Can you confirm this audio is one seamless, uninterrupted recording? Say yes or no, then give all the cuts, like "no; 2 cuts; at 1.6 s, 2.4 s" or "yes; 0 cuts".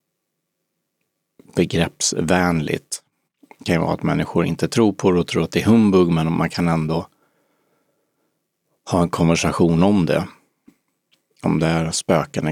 yes; 0 cuts